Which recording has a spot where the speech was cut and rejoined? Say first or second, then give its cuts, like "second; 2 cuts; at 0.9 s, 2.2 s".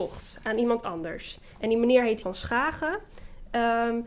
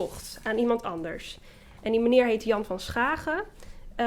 first; 2 cuts; at 1.5 s, 2.2 s